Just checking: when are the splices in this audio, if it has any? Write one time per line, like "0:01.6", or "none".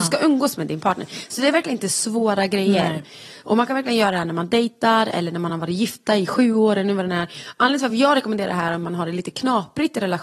none